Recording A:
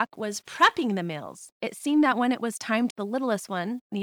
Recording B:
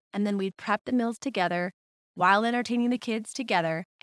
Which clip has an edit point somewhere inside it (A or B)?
A